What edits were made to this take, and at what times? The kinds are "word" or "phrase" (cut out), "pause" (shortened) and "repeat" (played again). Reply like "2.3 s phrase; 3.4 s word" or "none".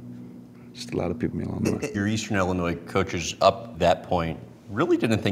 1.3 s word; 1.9 s word; 3.7 s word